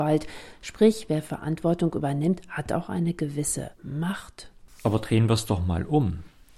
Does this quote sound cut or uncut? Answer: cut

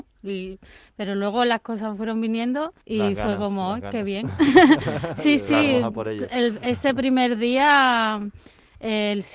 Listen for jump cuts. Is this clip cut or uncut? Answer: cut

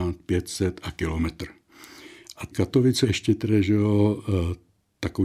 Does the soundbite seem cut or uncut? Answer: cut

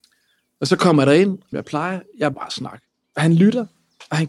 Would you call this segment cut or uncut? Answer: cut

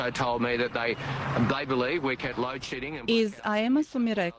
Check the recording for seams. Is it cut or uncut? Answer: cut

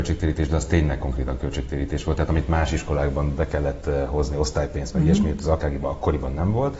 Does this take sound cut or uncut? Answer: uncut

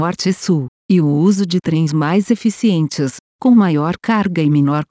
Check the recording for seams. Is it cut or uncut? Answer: cut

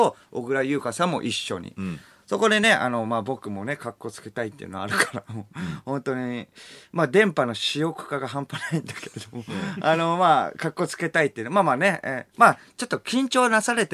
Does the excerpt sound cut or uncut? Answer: uncut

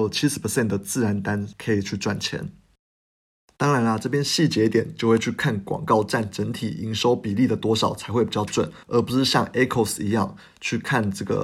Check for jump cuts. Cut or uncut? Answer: cut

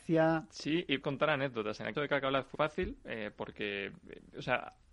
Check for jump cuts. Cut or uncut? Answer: cut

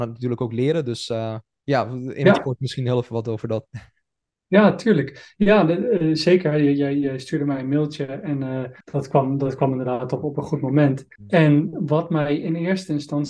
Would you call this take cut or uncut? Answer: cut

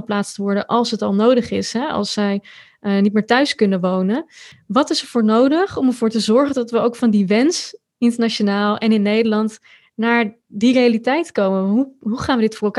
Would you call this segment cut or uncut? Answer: uncut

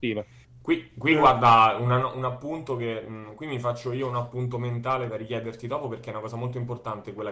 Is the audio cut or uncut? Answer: uncut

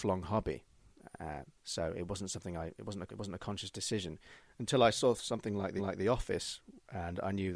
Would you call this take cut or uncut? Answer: cut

